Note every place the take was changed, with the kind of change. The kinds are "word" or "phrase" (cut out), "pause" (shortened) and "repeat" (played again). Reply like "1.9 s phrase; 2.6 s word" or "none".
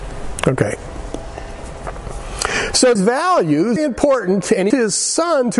3.0 s word; 3.8 s phrase; 4.7 s word